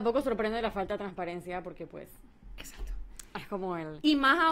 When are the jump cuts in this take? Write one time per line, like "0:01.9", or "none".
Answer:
none